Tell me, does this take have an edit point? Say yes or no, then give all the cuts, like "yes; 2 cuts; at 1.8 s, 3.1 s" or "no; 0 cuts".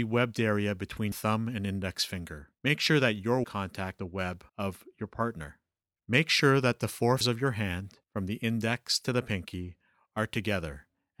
yes; 8 cuts; at 1.1 s, 2.5 s, 3.4 s, 4.0 s, 4.5 s, 5.8 s, 7.2 s, 8.0 s